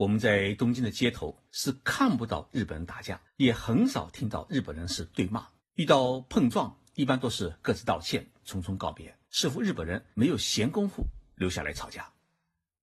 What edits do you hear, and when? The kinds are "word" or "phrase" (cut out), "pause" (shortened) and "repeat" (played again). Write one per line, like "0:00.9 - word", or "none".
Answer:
0:01.5 - pause
0:03.2 - pause
0:05.6 - pause
0:09.2 - pause
0:10.1 - pause